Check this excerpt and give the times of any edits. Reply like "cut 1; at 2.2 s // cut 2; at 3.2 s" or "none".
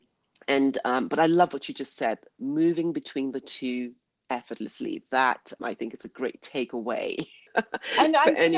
cut 1; at 5.6 s // cut 2; at 7.5 s